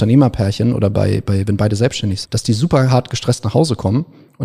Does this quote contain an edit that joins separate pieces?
yes; 1 cut; at 2.2 s

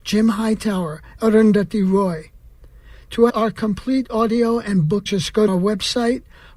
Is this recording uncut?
no; 4 cuts; at 1.2 s, 3.3 s, 5.1 s, 5.5 s

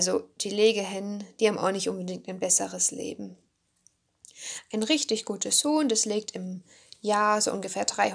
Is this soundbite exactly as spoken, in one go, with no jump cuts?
yes; 0 cuts

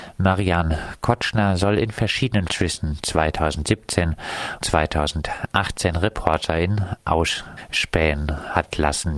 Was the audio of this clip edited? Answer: yes; 2 cuts; at 2.5 s, 4.6 s

